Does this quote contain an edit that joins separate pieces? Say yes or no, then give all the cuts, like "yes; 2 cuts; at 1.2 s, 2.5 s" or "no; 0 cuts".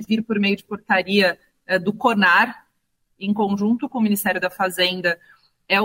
no; 0 cuts